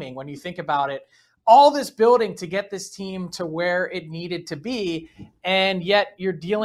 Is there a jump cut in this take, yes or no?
no